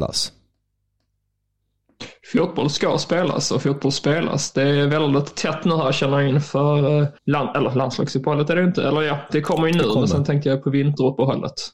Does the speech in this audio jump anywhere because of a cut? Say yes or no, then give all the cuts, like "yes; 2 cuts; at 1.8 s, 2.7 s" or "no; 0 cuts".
yes; 1 cut; at 7.2 s